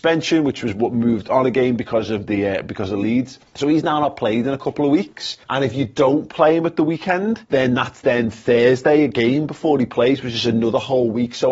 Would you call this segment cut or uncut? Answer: cut